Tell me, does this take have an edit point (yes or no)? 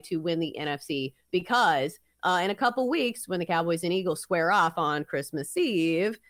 no